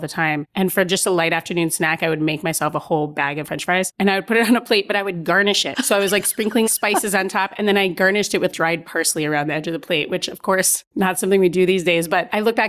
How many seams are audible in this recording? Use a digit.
3